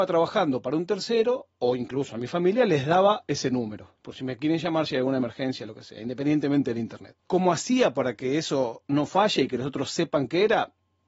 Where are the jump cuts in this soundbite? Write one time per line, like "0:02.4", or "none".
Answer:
0:04.0
0:07.2

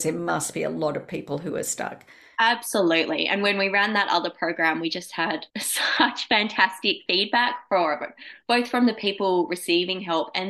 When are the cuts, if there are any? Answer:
0:05.5

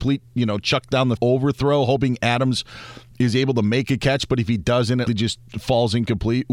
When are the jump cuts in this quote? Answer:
0:01.2
0:05.1

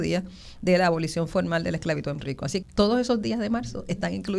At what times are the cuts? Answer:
0:02.2
0:02.6

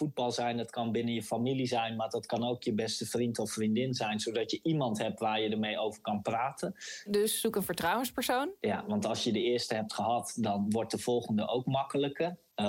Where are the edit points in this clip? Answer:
none

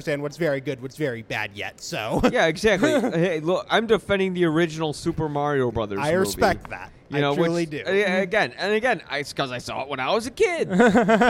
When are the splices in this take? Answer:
none

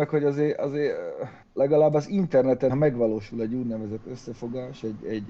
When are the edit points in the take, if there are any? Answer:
0:01.4
0:02.7

